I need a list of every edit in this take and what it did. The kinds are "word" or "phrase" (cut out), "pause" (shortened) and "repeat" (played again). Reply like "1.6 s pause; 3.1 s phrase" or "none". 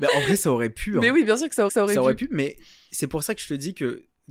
1.7 s repeat